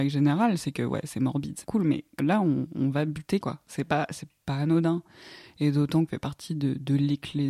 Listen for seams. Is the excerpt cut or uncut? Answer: cut